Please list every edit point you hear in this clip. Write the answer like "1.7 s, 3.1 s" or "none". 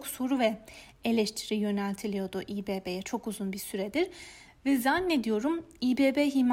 none